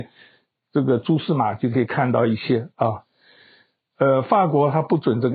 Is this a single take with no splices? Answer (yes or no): yes